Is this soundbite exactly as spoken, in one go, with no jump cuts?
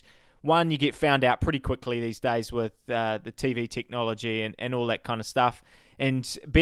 yes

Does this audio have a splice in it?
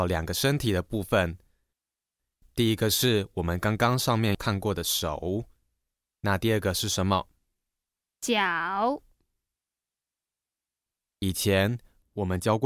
no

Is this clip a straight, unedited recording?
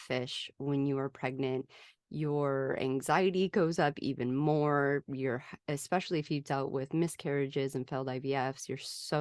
yes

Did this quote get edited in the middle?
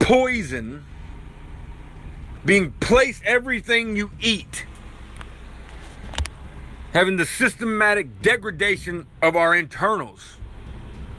yes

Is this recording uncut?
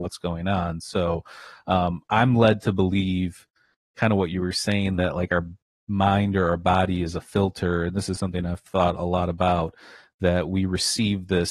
yes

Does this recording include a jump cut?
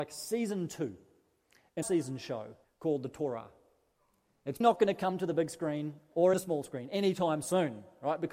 yes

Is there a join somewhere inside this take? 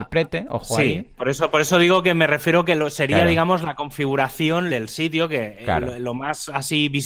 yes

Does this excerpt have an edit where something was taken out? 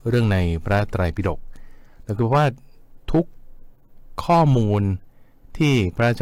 yes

